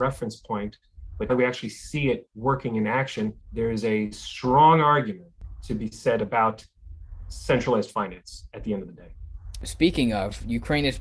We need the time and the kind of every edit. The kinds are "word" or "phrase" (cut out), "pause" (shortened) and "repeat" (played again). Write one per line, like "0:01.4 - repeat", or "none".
0:01.3 - word
0:03.4 - pause